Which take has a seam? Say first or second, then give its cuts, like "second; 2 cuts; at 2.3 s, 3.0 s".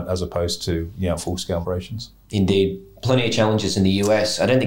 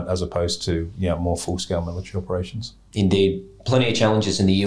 first; 2 cuts; at 1.2 s, 1.6 s